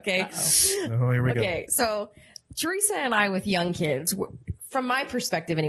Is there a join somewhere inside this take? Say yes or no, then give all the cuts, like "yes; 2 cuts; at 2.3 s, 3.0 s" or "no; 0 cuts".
no; 0 cuts